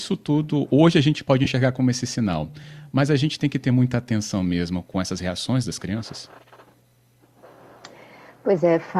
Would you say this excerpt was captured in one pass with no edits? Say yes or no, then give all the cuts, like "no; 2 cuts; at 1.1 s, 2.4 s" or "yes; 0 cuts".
yes; 0 cuts